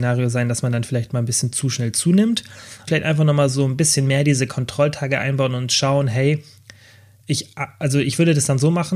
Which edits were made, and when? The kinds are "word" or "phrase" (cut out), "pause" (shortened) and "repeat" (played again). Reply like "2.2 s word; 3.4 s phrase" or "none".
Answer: 2.9 s word